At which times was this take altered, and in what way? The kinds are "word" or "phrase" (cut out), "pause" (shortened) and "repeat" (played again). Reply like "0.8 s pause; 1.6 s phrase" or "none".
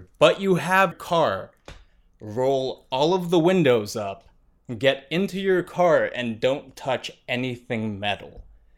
0.9 s word

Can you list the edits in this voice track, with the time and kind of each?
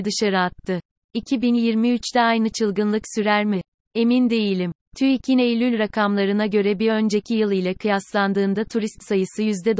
none

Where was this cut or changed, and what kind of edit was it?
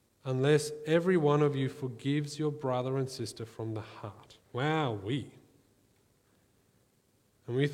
4.4 s pause

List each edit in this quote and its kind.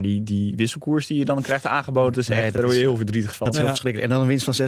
2.1 s word

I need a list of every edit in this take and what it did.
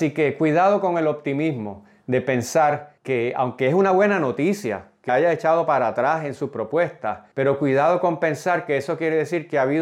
3.0 s pause; 5.1 s phrase; 7.3 s pause

